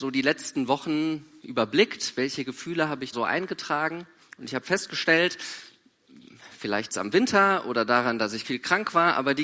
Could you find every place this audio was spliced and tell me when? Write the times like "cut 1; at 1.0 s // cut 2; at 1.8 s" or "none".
cut 1; at 3.1 s // cut 2; at 4.2 s // cut 3; at 6.9 s // cut 4; at 8.4 s